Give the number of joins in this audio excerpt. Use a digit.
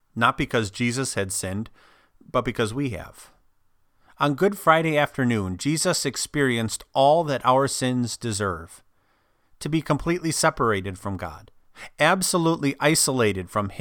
0